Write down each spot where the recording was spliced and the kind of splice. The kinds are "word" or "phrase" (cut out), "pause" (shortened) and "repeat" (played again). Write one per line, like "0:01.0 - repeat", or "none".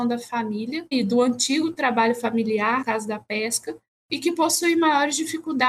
0:00.9 - word
0:02.8 - word